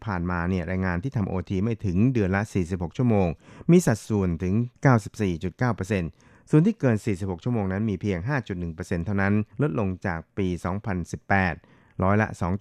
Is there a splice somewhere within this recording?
yes; 2 cuts; at 4.8 s, 9.5 s

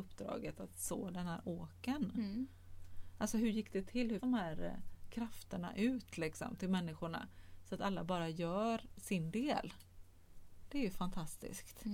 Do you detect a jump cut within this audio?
yes; 1 cut; at 4.2 s

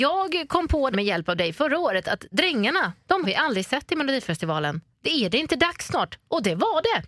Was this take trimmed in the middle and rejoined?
yes; 2 cuts; at 0.9 s, 3.2 s

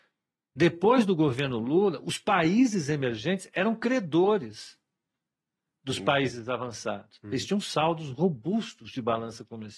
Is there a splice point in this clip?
no; 0 cuts

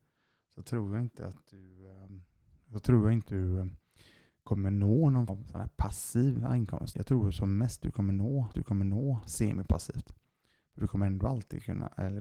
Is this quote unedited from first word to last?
no; 4 cuts; at 3.3 s, 5.3 s, 6.9 s, 8.5 s

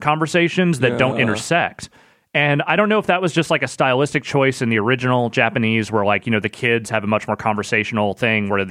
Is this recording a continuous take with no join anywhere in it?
yes; 0 cuts

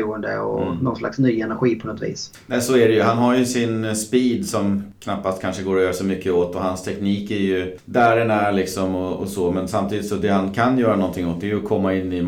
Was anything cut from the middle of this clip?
no; 0 cuts

